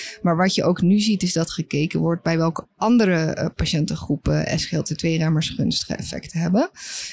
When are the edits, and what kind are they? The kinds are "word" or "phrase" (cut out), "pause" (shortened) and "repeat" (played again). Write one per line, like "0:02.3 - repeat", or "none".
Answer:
none